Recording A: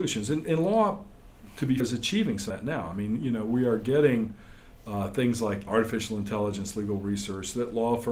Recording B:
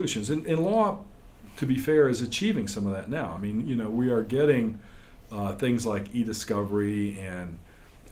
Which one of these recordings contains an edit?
A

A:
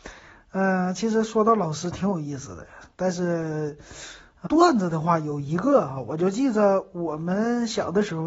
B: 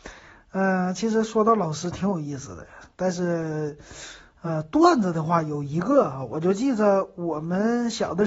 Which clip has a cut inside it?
A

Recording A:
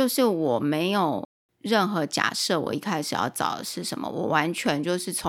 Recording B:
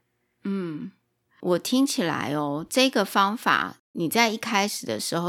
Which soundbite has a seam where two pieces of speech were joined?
A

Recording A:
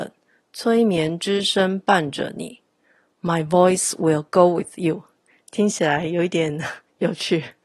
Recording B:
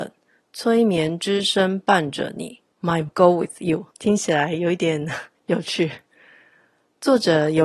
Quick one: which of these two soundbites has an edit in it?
B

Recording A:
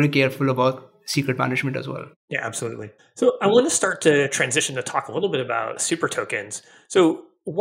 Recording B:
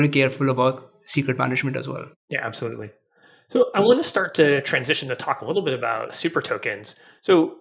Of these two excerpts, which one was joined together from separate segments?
A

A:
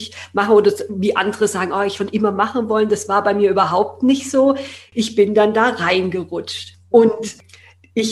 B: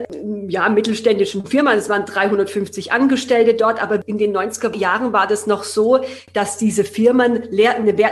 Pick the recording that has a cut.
A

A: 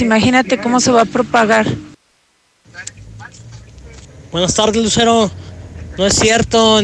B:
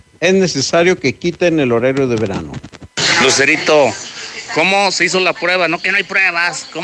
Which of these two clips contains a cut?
B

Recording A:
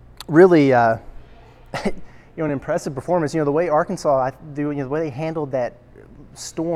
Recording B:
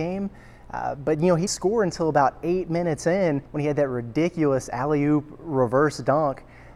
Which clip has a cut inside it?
B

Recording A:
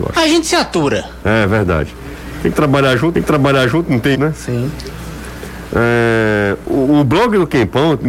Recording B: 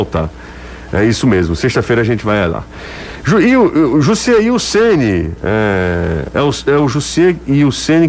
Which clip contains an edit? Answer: A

